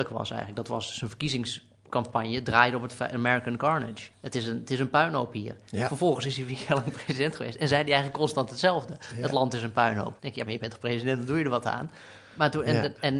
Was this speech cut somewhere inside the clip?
yes; 2 cuts; at 4.1 s, 10.2 s

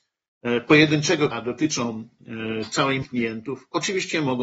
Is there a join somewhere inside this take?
yes; 2 cuts; at 1.3 s, 3.0 s

